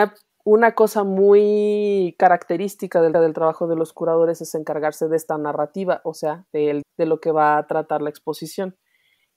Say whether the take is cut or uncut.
cut